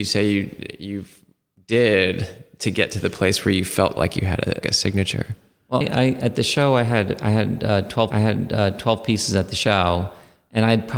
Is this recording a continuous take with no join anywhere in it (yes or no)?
no